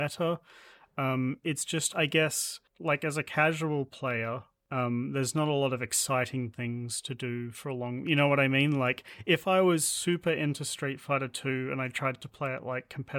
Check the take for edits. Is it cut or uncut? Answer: uncut